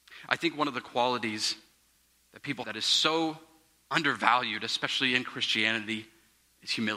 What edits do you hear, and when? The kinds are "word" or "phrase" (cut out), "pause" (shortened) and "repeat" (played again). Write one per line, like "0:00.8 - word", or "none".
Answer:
0:02.6 - word

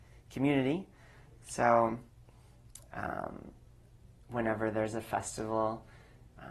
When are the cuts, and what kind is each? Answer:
0:03.8 - pause

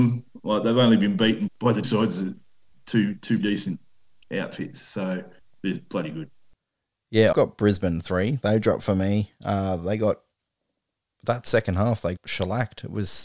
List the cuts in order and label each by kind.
0:01.5 - word
0:01.8 - word
0:02.7 - phrase
0:03.4 - word
0:05.4 - pause
0:07.3 - word
0:12.2 - word

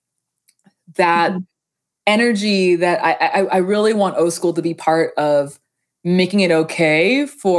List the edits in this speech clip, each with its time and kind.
none

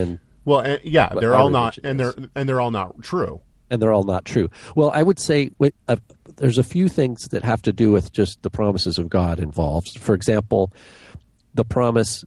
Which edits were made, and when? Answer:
none

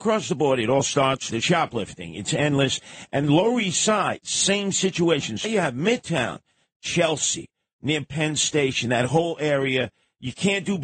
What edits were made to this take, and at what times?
0:01.3 - word
0:03.2 - word
0:05.4 - word

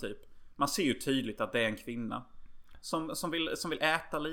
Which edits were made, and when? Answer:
none

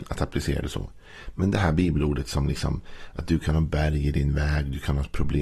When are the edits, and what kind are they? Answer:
none

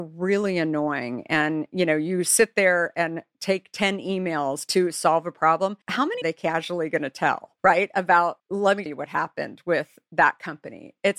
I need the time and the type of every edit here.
0:05.8 - pause
0:06.2 - phrase
0:07.6 - pause
0:08.4 - word
0:08.9 - word

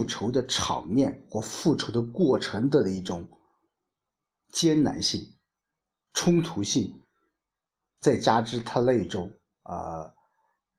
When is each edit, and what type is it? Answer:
none

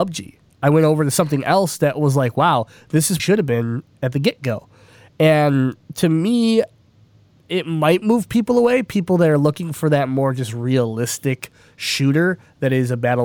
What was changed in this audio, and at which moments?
0:03.2 - phrase

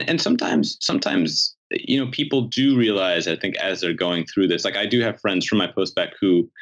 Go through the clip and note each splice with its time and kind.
0:01.6 - pause

